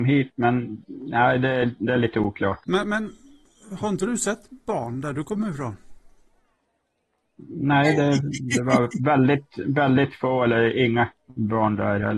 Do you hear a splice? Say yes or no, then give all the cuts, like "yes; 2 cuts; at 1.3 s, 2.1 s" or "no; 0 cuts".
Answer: yes; 1 cut; at 2.6 s